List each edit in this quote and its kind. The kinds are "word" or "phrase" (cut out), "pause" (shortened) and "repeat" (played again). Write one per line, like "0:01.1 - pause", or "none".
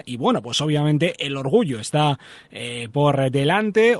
0:02.9 - word